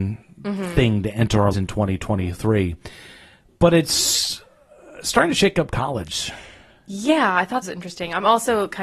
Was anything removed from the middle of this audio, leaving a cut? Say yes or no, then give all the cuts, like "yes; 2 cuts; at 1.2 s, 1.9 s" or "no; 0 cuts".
yes; 2 cuts; at 1.5 s, 7.6 s